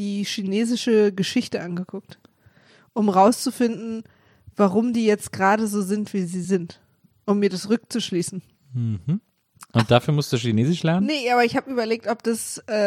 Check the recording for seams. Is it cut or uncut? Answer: uncut